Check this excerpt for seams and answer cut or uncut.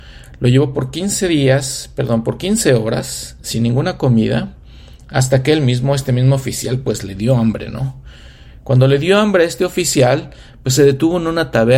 uncut